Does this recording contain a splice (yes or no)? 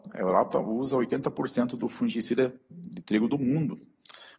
no